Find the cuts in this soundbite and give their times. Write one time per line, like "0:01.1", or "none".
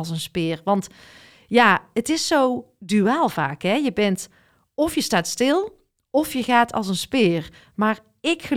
none